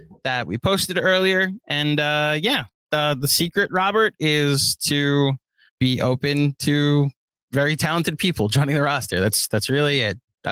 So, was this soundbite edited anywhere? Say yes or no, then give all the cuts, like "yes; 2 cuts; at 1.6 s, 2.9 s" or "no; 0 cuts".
yes; 1 cut; at 5.7 s